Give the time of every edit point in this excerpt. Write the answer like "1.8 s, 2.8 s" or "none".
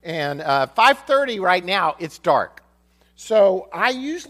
none